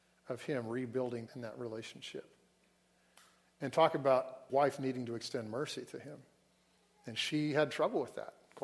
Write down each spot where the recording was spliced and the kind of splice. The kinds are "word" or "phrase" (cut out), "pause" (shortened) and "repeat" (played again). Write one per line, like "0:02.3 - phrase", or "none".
0:01.3 - word
0:04.5 - word